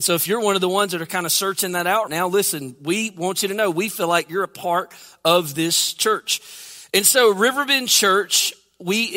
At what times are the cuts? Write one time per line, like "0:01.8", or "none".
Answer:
0:02.1